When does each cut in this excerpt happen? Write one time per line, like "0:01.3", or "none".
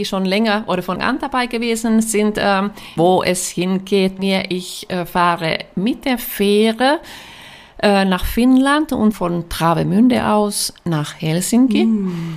0:01.0
0:03.0
0:04.2
0:09.1